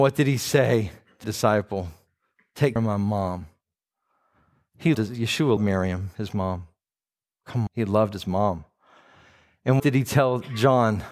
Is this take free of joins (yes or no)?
no